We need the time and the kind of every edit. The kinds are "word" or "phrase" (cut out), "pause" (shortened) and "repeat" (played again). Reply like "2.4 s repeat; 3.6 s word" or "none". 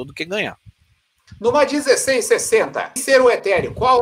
3.0 s word